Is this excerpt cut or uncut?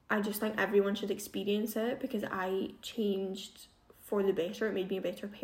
uncut